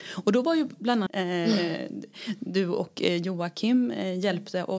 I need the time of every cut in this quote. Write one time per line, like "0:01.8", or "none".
0:01.1